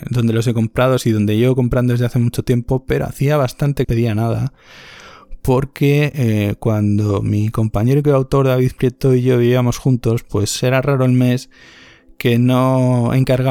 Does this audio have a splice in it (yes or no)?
yes